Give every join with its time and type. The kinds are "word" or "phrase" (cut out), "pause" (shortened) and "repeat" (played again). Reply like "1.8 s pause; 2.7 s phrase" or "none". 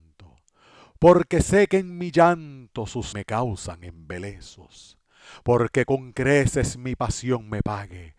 3.1 s phrase